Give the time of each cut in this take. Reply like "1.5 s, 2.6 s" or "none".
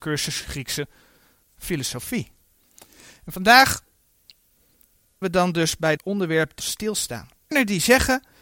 5.2 s, 6.0 s, 6.6 s, 7.5 s